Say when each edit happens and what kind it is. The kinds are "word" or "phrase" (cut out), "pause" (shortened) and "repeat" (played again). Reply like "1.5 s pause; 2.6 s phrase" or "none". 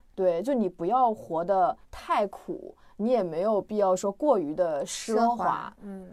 1.8 s pause